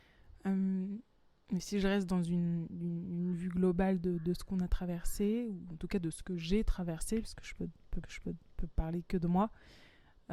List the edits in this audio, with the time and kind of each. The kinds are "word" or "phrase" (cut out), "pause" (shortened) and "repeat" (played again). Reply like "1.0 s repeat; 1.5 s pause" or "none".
8.0 s repeat